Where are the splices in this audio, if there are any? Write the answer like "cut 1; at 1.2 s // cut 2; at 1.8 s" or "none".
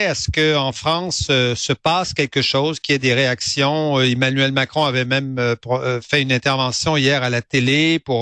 none